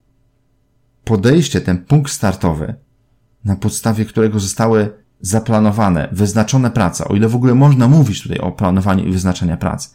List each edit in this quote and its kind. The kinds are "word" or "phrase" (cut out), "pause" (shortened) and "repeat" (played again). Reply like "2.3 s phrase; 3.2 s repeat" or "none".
5.0 s pause